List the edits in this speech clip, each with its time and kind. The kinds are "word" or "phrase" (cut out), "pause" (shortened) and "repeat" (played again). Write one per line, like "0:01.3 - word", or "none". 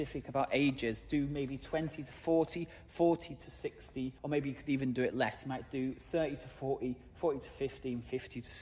0:04.2 - pause